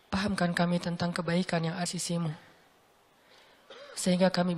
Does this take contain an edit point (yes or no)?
yes